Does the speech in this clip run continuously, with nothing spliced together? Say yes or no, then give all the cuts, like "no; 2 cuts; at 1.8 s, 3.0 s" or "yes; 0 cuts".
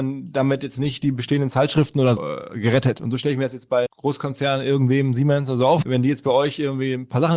no; 3 cuts; at 2.2 s, 3.9 s, 5.8 s